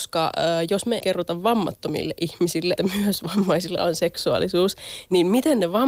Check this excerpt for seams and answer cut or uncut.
cut